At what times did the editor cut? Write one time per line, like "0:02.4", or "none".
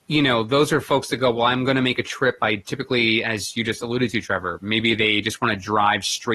none